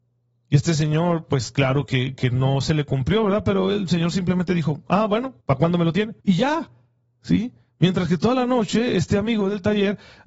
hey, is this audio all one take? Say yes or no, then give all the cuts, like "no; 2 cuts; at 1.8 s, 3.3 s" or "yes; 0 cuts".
no; 3 cuts; at 5.4 s, 6.2 s, 7.7 s